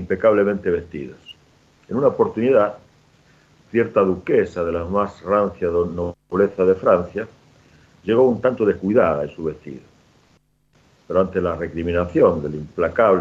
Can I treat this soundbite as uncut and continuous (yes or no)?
yes